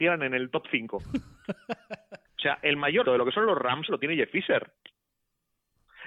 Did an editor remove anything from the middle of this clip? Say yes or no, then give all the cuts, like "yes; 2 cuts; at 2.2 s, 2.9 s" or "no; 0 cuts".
yes; 3 cuts; at 2.2 s, 3.0 s, 3.9 s